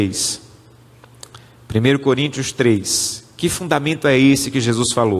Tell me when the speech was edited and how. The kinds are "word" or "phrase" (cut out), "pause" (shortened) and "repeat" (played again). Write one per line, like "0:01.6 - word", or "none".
none